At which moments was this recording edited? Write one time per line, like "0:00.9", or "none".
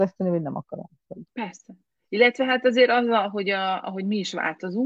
0:01.3